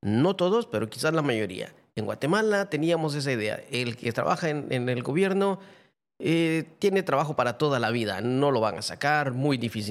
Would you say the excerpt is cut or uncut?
uncut